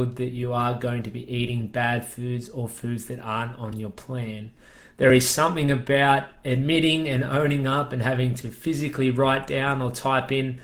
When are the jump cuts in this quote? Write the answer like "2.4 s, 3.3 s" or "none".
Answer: none